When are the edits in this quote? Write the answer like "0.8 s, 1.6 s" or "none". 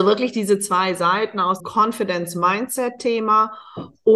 1.6 s

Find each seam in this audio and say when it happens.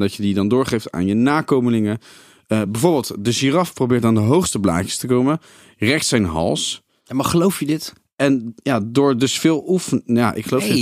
none

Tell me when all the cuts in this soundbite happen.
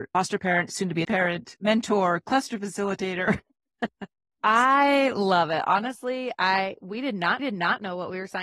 1.0 s, 7.4 s

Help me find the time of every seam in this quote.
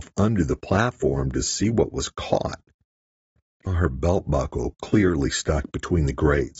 3.7 s

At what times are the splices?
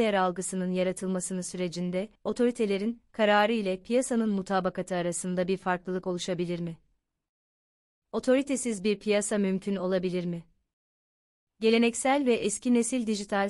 2.2 s

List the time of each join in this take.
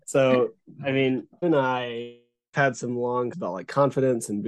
1.4 s, 2.5 s, 3.3 s

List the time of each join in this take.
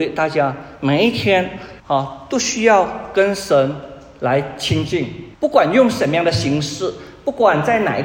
1.8 s, 5.3 s

